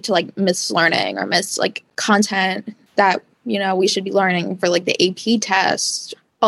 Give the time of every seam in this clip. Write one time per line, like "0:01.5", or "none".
0:01.9